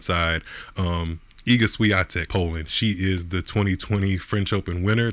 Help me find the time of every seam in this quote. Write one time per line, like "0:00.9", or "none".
0:02.3